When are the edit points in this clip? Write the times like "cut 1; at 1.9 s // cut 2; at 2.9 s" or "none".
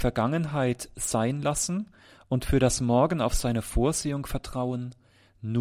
none